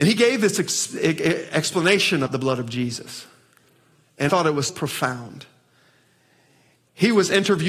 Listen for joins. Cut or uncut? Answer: cut